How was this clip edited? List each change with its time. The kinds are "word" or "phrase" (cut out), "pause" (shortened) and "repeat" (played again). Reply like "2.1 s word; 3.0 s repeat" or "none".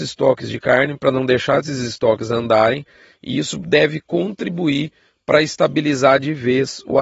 none